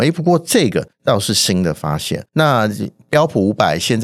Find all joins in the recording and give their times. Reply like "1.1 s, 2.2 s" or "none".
0.9 s, 2.3 s